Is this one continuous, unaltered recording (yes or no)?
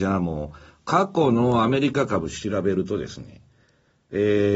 yes